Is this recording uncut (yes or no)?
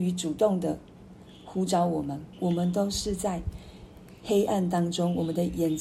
no